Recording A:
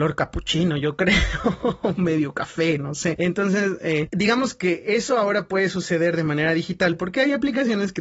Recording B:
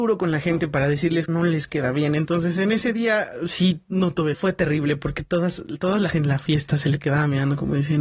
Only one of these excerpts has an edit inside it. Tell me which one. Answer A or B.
B